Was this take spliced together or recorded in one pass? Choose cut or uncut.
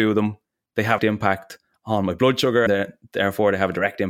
cut